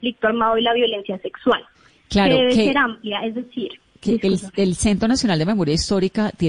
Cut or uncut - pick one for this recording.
cut